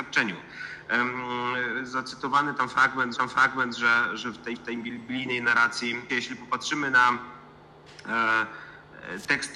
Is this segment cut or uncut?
cut